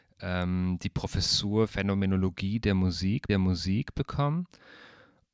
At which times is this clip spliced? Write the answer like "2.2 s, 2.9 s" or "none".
1.7 s, 3.3 s